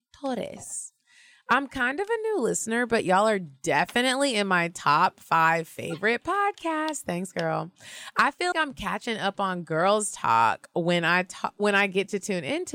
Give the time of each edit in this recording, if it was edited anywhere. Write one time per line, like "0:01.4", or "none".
0:08.5